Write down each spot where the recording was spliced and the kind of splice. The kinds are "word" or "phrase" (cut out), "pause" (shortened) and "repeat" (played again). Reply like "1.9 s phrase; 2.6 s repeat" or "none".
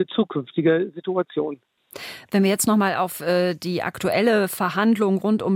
none